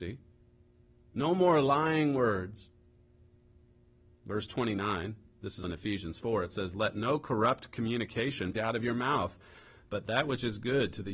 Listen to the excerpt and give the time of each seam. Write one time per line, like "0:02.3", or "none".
0:05.6
0:08.5